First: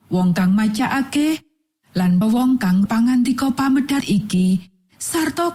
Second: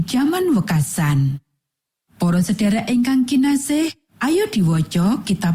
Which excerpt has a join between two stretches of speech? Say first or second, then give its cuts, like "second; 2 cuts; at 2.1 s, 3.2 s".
first; 3 cuts; at 2.2 s, 2.9 s, 4.0 s